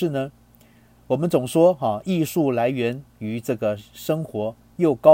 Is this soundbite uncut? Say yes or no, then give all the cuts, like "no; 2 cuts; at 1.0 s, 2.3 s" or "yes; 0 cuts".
no; 1 cut; at 3.1 s